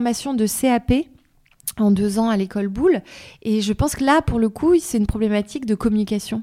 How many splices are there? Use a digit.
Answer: 0